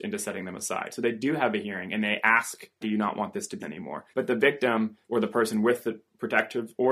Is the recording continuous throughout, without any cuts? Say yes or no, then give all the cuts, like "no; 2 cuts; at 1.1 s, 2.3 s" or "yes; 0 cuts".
no; 4 cuts; at 2.8 s, 3.6 s, 4.1 s, 5.0 s